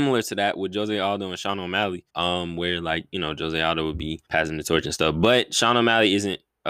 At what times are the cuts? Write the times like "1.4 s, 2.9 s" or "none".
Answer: 2.1 s, 4.2 s